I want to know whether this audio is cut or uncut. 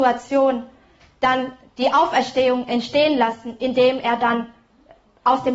uncut